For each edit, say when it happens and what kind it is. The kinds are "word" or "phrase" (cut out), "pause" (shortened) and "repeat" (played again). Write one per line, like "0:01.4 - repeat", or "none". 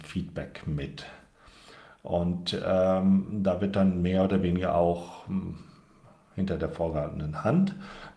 none